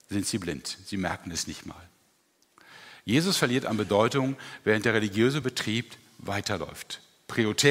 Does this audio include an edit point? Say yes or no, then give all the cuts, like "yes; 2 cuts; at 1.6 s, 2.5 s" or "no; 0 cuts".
no; 0 cuts